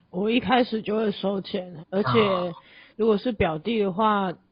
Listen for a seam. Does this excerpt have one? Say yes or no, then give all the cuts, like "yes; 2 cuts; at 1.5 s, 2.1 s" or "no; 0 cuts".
yes; 1 cut; at 1.8 s